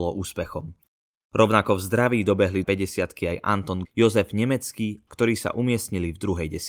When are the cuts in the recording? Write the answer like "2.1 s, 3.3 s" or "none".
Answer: 2.6 s, 3.9 s, 5.1 s